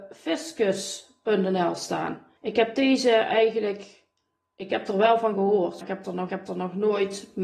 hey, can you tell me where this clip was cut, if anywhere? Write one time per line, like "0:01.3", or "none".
0:02.4
0:05.8
0:06.3